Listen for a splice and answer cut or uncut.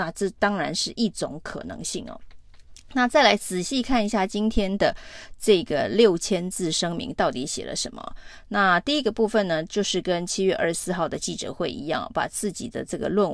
uncut